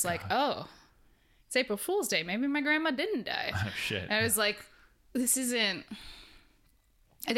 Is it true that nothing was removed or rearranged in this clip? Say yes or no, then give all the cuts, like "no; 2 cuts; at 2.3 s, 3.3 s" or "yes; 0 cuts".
yes; 0 cuts